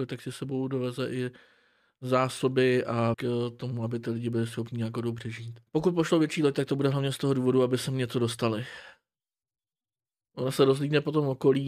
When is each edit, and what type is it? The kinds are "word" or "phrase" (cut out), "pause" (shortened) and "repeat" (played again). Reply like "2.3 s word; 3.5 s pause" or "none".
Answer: 3.1 s word; 5.7 s pause